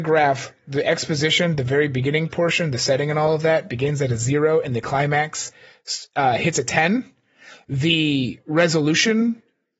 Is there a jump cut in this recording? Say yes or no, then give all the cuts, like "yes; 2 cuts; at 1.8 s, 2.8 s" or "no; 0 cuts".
no; 0 cuts